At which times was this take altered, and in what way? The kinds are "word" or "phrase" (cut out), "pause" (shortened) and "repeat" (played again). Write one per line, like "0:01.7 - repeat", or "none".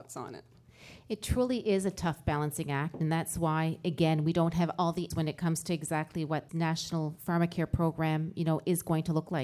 0:05.1 - word
0:06.5 - word